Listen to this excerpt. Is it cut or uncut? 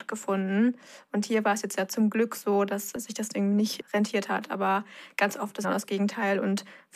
cut